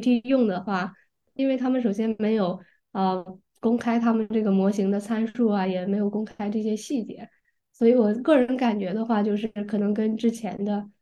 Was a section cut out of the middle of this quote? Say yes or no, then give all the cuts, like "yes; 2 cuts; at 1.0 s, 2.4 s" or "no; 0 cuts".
yes; 1 cut; at 1.4 s